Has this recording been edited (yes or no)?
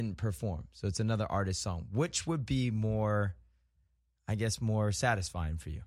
no